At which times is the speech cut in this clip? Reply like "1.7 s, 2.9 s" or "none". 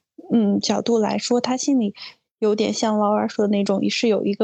none